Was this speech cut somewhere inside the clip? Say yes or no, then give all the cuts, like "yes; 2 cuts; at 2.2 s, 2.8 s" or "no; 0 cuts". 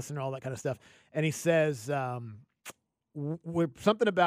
no; 0 cuts